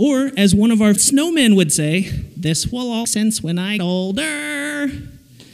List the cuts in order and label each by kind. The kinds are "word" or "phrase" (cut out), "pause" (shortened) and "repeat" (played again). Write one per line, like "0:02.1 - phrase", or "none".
0:01.0 - word
0:03.0 - word
0:03.8 - word

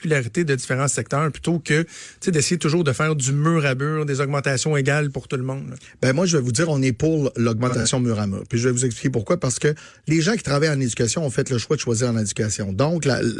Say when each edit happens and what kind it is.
none

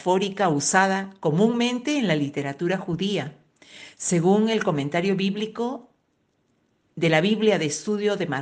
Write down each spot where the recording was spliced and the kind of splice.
none

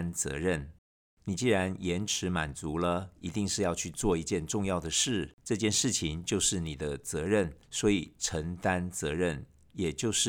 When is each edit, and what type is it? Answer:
0:05.4 - pause
0:07.6 - pause

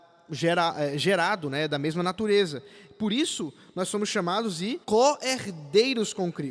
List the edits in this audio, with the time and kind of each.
0:04.8 - pause

